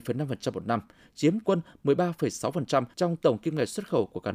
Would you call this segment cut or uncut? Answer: cut